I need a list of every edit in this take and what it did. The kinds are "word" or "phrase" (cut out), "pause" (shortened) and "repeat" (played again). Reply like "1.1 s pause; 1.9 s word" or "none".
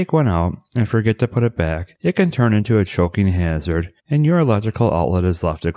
1.9 s pause; 4.0 s pause